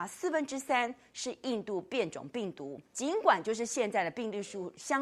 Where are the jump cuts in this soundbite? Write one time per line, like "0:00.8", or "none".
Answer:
0:02.9